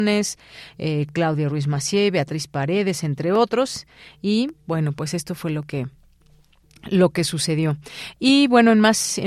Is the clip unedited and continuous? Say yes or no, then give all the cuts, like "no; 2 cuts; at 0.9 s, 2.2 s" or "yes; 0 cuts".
yes; 0 cuts